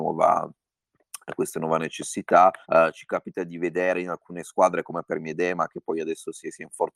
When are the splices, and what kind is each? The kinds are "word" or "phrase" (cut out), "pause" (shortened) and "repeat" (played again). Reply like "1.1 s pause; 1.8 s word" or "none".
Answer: 2.6 s pause